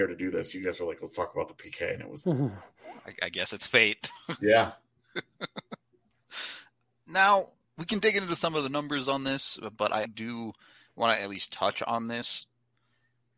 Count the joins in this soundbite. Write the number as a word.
three